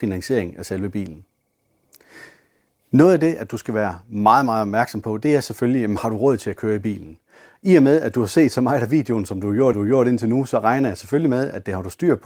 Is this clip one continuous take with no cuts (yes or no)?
no